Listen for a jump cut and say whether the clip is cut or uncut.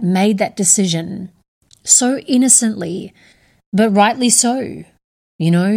cut